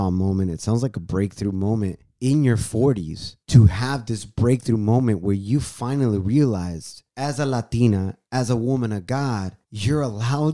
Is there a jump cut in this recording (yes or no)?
yes